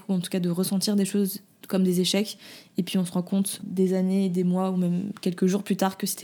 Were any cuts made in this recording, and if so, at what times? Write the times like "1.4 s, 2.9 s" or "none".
3.6 s

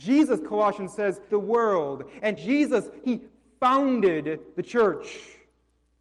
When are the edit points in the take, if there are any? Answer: 1.3 s, 2.4 s, 3.0 s

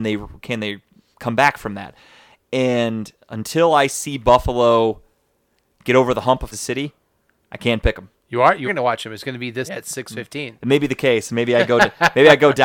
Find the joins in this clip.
1.1 s, 6.5 s, 8.7 s, 9.7 s

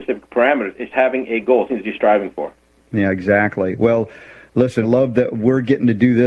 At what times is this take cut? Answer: 0.9 s, 1.7 s, 4.8 s

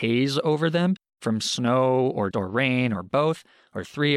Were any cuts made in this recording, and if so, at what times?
2.3 s

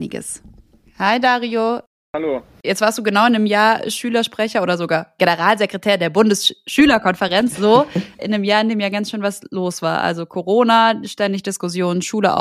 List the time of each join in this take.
none

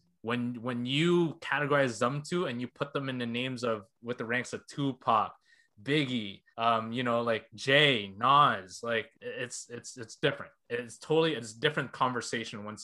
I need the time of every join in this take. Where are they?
6.5 s, 7.5 s, 9.1 s

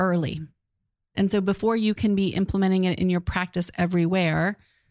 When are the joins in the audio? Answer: none

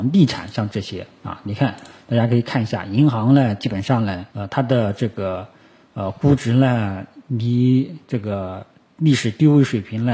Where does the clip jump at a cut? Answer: 4.3 s

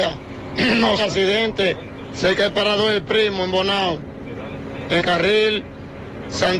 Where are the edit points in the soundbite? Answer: 1.0 s, 5.0 s

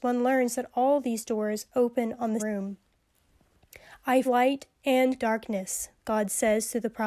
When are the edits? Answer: 2.4 s, 4.2 s, 5.2 s

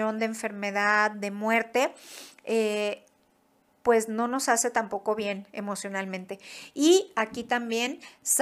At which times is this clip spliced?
none

